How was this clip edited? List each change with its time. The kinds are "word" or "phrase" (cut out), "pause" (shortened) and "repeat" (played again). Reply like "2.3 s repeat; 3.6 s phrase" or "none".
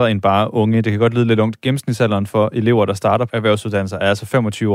3.3 s word